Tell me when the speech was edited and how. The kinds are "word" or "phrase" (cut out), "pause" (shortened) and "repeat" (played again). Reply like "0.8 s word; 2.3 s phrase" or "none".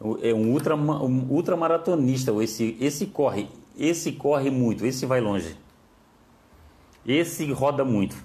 none